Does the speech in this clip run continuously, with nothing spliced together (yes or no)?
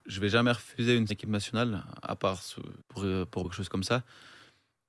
no